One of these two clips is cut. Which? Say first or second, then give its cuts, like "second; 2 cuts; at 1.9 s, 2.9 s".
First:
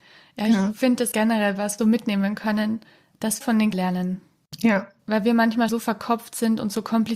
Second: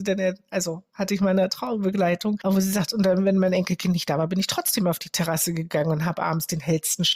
first; 5 cuts; at 1.1 s, 1.8 s, 3.4 s, 3.7 s, 5.7 s